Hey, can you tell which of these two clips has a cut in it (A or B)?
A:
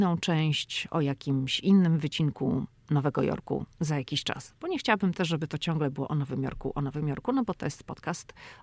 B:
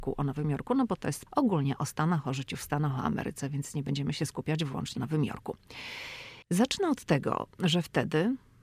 B